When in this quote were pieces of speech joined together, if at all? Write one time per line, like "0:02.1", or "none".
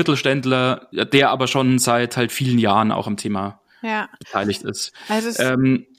none